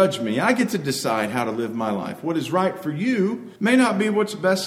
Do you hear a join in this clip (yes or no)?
yes